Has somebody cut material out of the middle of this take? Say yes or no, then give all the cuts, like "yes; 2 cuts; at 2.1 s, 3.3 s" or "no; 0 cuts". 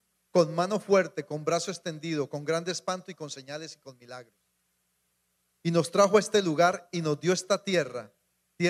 no; 0 cuts